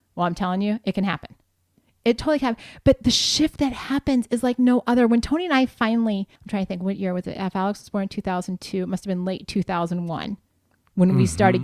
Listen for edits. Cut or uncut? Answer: cut